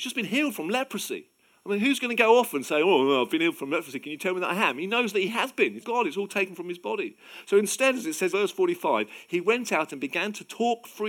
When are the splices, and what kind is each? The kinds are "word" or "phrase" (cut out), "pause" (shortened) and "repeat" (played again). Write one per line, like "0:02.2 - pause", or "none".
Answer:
0:05.8 - word
0:08.3 - word